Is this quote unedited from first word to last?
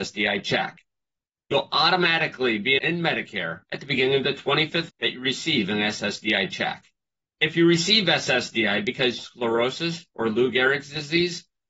no; 5 cuts; at 2.8 s, 3.6 s, 4.9 s, 7.0 s, 9.2 s

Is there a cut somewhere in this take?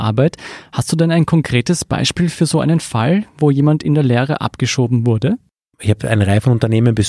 no; 0 cuts

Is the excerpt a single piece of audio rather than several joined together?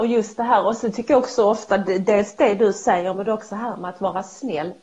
yes; 0 cuts

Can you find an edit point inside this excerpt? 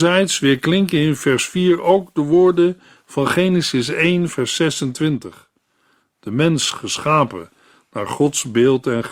no; 0 cuts

